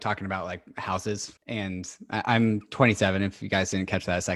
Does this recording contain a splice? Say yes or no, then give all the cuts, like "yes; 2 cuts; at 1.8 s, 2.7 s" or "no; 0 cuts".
yes; 1 cut; at 1.4 s